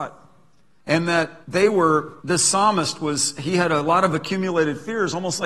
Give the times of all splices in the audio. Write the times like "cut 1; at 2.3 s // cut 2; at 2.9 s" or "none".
cut 1; at 1.4 s // cut 2; at 2.2 s